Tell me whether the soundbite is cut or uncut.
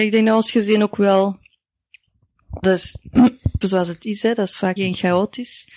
cut